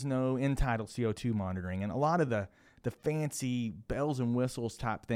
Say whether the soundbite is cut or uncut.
uncut